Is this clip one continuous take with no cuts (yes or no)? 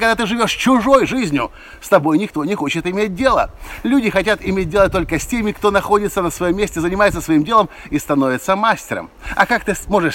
yes